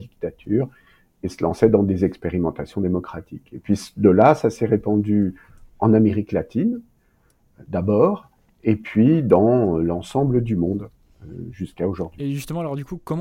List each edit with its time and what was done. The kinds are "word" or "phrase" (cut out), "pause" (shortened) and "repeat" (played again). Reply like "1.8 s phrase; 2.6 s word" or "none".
none